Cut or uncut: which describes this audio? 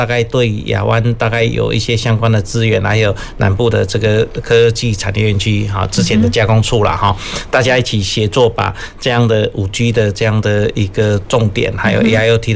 uncut